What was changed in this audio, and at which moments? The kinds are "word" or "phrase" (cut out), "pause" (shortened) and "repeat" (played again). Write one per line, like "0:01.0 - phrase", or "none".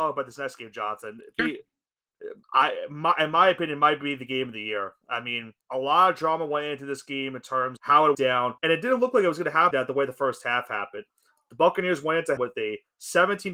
0:01.4 - word
0:02.4 - pause
0:05.6 - pause
0:07.8 - word
0:08.1 - word
0:08.6 - pause
0:09.7 - word
0:12.4 - word